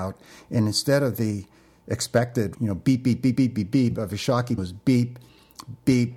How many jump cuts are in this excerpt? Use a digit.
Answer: 3